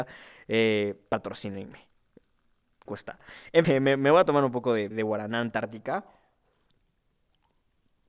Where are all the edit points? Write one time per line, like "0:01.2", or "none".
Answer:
0:02.9
0:03.6
0:04.9